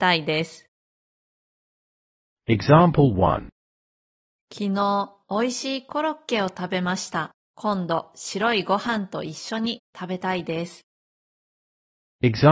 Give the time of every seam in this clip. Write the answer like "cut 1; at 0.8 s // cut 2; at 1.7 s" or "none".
cut 1; at 5.2 s // cut 2; at 7.4 s